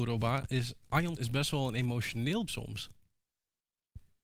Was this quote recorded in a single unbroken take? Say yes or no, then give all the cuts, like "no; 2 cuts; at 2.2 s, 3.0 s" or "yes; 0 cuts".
no; 2 cuts; at 1.2 s, 2.5 s